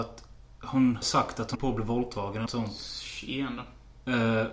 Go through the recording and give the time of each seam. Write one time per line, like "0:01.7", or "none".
0:01.0
0:01.5
0:02.5